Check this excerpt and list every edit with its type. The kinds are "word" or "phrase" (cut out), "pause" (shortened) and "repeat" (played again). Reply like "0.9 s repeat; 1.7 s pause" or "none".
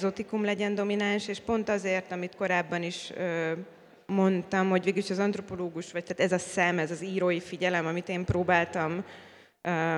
none